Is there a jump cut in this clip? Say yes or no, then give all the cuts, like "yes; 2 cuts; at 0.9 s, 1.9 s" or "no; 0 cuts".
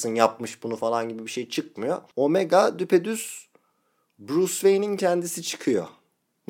no; 0 cuts